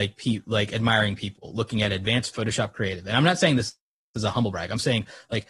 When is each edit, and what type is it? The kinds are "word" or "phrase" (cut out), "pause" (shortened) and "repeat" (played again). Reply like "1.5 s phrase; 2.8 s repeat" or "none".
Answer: 2.3 s word

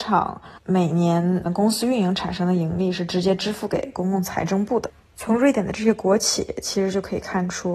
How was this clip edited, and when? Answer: 1.5 s word

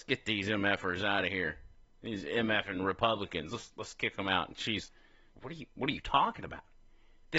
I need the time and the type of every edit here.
5.3 s word

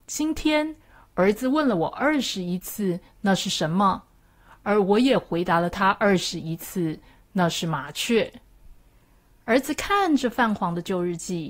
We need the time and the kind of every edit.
none

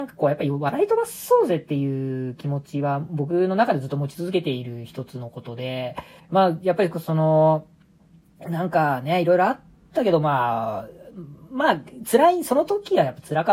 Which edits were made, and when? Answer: 6.2 s pause

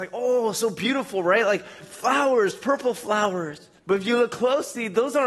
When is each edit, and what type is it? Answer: 1.8 s word; 3.8 s pause

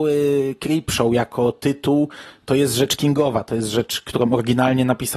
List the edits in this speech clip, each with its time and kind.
none

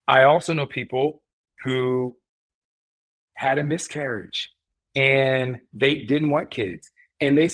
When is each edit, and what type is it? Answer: none

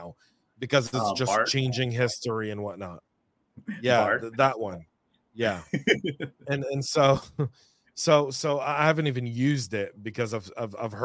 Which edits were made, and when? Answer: none

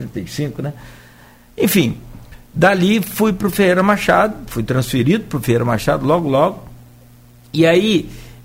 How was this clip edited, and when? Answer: none

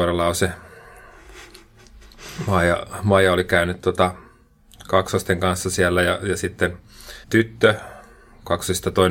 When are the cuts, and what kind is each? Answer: 7.2 s pause

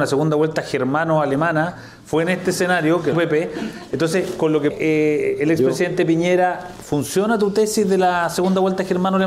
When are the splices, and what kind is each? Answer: 3.1 s phrase; 4.7 s word

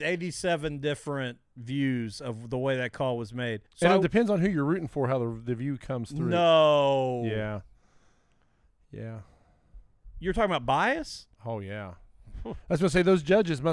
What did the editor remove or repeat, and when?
3.7 s pause; 11.3 s pause

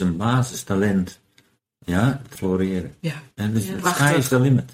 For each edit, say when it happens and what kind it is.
2.4 s word; 3.3 s pause

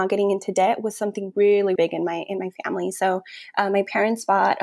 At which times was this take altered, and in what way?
1.8 s word

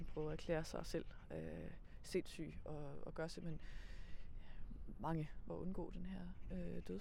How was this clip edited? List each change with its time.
5.5 s phrase

